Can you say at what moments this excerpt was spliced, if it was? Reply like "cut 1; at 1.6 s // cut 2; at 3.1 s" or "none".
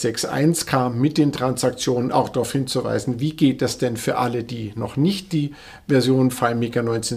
none